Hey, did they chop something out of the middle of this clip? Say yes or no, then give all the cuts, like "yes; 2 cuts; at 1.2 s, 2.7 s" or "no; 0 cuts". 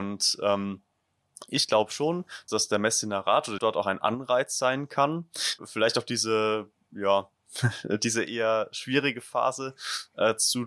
yes; 3 cuts; at 2.5 s, 3.6 s, 5.6 s